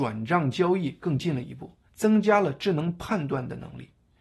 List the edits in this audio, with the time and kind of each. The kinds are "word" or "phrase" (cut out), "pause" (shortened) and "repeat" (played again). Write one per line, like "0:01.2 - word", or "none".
0:01.9 - pause